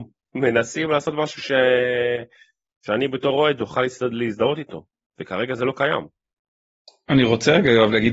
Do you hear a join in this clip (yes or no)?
no